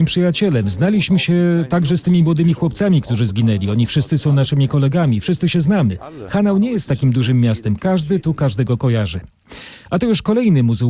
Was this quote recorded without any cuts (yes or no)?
yes